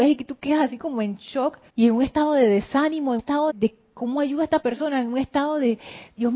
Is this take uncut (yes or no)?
no